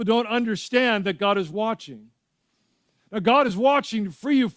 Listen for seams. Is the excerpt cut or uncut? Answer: uncut